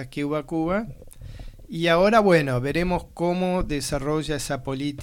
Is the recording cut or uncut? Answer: uncut